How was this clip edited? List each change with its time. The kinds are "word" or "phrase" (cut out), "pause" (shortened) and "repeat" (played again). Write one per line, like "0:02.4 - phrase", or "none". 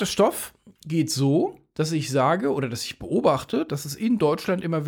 0:01.7 - pause